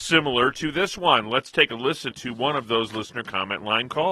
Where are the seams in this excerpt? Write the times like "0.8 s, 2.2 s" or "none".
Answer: 2.1 s

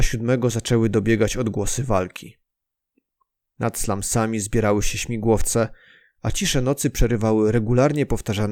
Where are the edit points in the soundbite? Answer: none

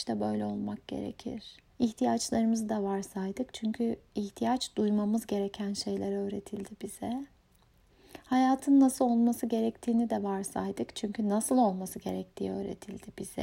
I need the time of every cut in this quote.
1.7 s

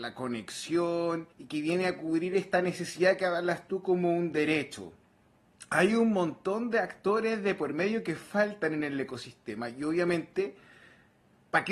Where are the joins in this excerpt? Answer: 1.3 s

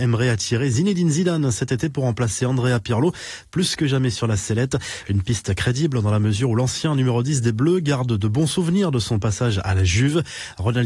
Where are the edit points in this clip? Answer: none

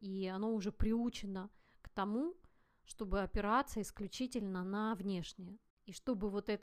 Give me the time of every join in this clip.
none

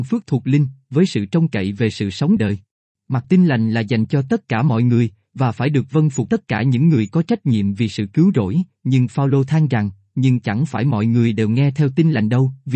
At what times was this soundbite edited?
2.4 s, 3.2 s, 6.3 s

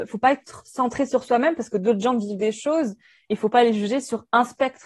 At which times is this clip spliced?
none

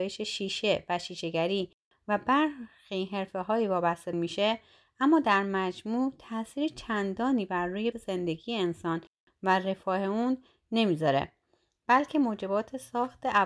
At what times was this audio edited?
4.1 s, 7.9 s

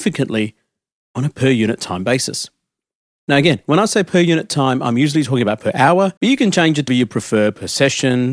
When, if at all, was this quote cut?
6.2 s, 6.9 s

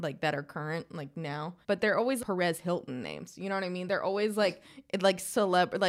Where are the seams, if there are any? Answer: 1.6 s, 2.2 s

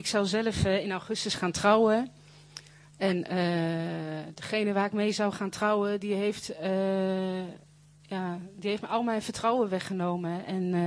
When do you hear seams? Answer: none

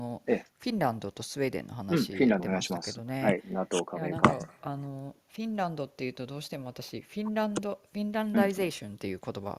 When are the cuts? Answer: 2.4 s

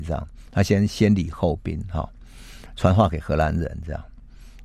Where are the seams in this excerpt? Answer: none

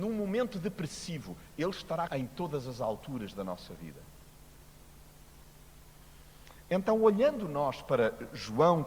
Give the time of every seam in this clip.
2.1 s

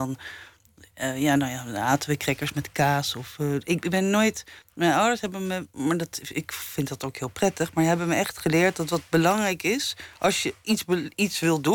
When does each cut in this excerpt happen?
4.6 s

